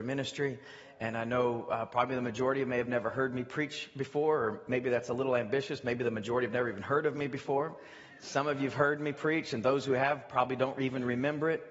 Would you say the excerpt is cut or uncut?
uncut